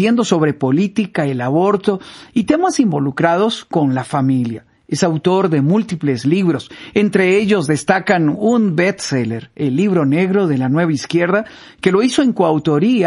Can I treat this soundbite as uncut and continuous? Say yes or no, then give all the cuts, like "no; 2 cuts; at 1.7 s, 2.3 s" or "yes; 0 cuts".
yes; 0 cuts